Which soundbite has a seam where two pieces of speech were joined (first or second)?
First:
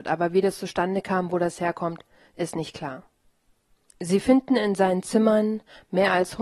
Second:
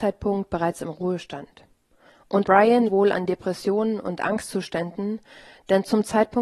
second